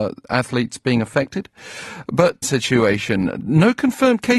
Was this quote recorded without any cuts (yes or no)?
no